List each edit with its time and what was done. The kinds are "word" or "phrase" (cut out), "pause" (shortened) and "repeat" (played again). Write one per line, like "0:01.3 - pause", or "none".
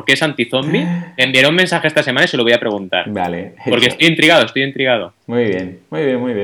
0:05.2 - pause